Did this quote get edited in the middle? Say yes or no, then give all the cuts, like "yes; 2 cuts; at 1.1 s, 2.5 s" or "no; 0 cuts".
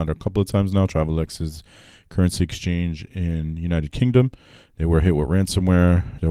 no; 0 cuts